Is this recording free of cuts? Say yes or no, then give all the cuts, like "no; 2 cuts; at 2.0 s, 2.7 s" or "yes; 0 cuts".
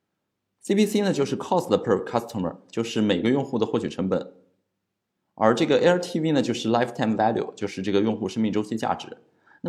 yes; 0 cuts